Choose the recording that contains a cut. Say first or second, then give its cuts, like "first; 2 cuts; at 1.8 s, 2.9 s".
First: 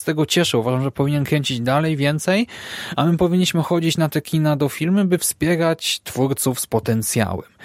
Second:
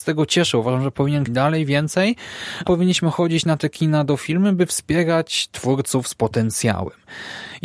second; 2 cuts; at 1.3 s, 2.7 s